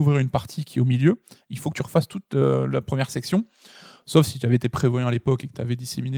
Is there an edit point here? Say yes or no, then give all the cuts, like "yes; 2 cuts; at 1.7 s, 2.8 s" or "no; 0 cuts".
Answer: no; 0 cuts